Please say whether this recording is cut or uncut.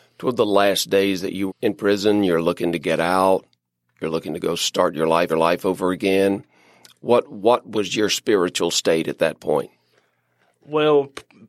cut